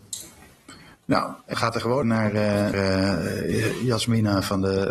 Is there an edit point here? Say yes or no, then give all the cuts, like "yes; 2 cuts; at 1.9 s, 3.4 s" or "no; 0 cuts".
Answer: yes; 3 cuts; at 1.5 s, 2.0 s, 2.7 s